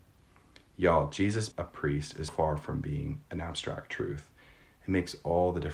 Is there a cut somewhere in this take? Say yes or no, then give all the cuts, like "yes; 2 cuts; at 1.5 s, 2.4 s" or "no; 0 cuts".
yes; 2 cuts; at 1.5 s, 2.3 s